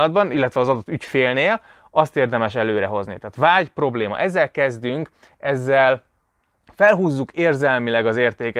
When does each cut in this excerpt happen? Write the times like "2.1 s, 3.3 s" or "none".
none